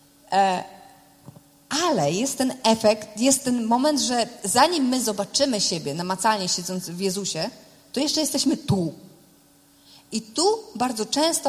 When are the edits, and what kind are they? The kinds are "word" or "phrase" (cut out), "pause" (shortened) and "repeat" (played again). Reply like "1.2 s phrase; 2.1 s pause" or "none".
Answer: none